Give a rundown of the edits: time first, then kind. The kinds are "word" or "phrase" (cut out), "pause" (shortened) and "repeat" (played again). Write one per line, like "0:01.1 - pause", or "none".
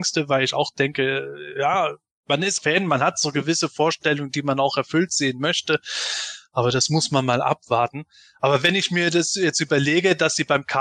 0:02.6 - word